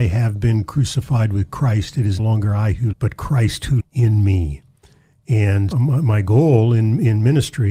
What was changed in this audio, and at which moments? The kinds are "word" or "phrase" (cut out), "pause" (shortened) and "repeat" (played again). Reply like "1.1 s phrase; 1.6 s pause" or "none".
2.2 s word; 2.9 s word; 3.8 s word; 5.7 s word